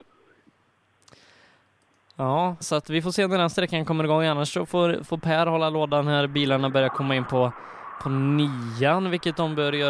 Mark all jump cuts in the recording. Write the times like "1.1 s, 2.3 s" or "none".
2.6 s